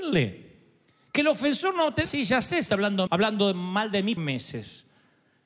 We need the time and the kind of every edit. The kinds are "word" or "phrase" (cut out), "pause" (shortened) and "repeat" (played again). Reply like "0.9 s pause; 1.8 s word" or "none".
2.0 s word; 2.7 s word; 3.1 s word; 4.2 s word